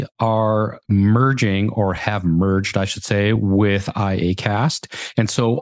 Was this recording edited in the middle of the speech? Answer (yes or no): no